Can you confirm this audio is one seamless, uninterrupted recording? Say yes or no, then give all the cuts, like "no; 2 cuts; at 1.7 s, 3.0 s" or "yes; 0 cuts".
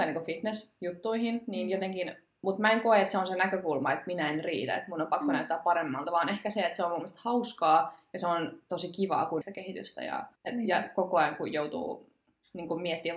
no; 2 cuts; at 9.4 s, 10.4 s